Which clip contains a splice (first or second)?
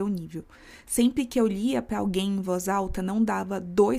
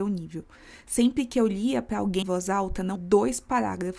second